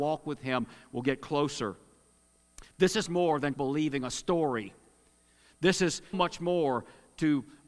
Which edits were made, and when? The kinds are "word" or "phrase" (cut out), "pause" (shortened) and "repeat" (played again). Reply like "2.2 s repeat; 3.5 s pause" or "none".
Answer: 3.1 s word; 3.5 s word; 6.1 s word